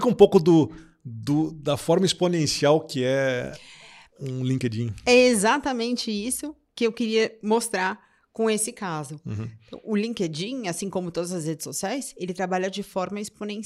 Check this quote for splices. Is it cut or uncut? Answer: uncut